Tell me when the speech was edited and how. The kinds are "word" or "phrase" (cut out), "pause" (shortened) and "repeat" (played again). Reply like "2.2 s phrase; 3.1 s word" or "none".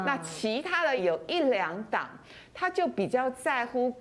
1.0 s phrase